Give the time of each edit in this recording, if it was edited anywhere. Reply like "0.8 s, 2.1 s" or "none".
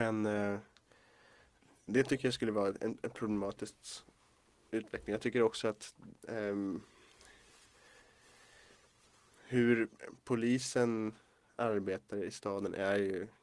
none